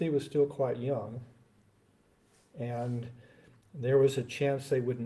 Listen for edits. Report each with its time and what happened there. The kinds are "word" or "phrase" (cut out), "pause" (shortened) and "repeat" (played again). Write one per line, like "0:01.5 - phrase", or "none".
none